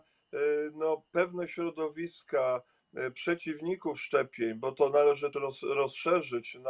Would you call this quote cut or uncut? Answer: cut